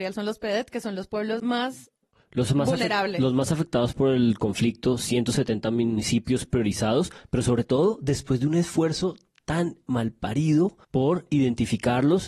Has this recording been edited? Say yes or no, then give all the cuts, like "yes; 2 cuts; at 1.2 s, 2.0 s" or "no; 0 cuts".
yes; 2 cuts; at 1.4 s, 10.8 s